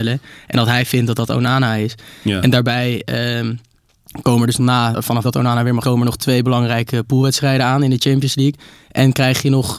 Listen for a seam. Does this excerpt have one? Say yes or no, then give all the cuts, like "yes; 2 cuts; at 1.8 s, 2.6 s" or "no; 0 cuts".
yes; 4 cuts; at 4.6 s, 4.9 s, 5.2 s, 5.8 s